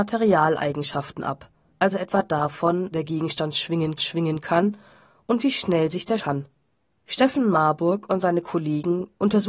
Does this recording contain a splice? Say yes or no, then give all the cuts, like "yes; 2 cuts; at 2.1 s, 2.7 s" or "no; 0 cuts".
yes; 4 cuts; at 1.7 s, 2.9 s, 4.0 s, 6.2 s